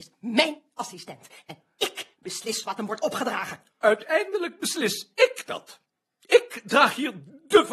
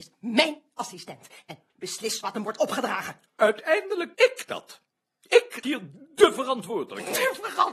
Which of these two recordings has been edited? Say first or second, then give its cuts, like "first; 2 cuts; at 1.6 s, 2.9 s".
second; 3 cuts; at 1.7 s, 4.1 s, 5.6 s